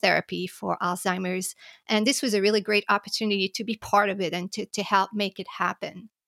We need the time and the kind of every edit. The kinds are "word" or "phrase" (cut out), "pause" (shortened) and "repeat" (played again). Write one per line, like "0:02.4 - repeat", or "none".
none